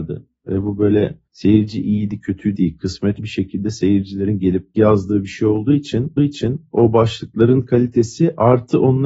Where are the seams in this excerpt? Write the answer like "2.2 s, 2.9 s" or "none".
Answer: 1.3 s, 2.5 s, 3.2 s, 4.7 s, 6.2 s